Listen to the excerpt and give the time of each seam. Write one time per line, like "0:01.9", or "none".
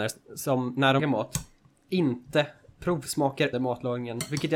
0:01.0
0:03.5

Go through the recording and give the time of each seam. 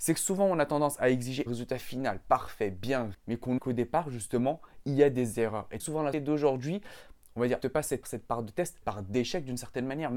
0:01.5
0:03.1
0:03.6
0:05.8
0:06.1
0:07.6
0:08.0
0:08.8

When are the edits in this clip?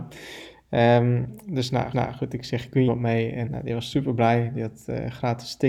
0:01.9
0:02.9
0:03.5

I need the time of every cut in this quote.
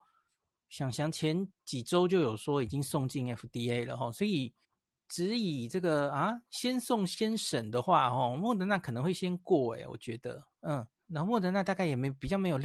0:01.5
0:04.6
0:10.9

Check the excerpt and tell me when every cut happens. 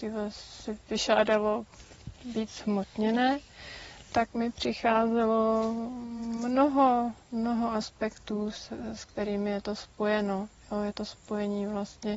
none

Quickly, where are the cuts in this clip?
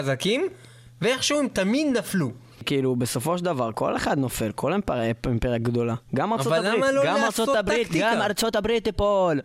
0:06.1

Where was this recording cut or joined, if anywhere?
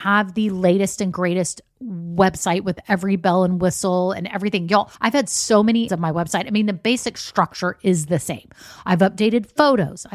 0:05.0
0:05.9

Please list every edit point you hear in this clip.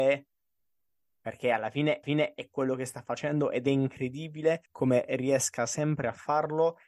0:02.0
0:04.7

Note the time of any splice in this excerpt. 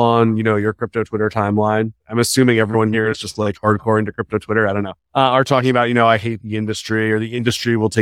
0:02.0
0:05.0

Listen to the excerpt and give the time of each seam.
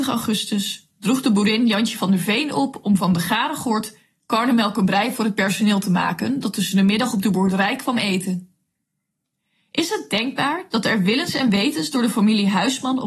none

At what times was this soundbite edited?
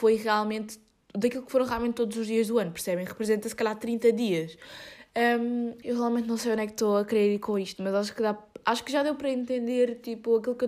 none

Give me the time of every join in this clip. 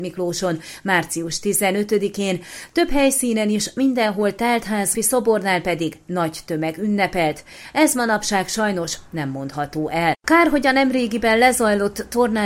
0:04.9

